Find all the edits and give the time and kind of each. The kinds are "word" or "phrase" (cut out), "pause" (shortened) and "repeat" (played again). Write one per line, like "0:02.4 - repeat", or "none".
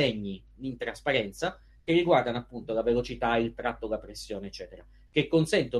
none